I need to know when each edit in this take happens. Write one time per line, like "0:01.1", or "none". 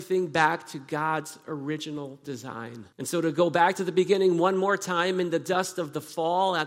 0:02.9